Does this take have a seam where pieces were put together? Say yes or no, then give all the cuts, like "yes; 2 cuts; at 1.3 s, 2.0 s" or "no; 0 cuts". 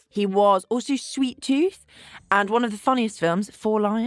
no; 0 cuts